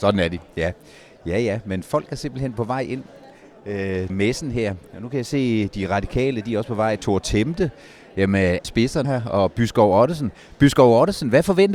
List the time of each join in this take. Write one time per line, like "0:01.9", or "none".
0:04.1
0:08.6
0:09.0